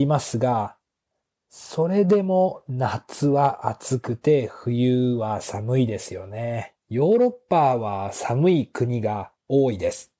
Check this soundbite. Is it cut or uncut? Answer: cut